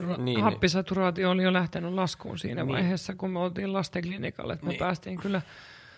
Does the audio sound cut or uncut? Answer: uncut